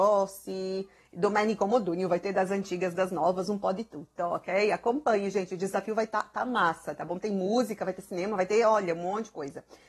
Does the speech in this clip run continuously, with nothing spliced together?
yes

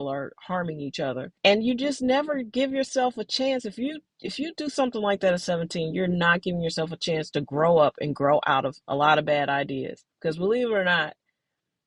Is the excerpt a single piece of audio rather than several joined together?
no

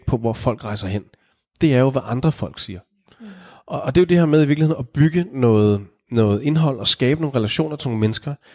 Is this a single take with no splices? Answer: yes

